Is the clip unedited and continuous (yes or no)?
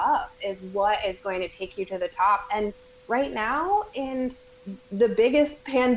yes